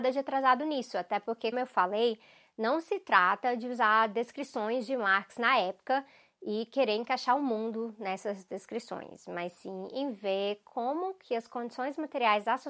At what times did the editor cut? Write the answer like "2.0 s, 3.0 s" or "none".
1.5 s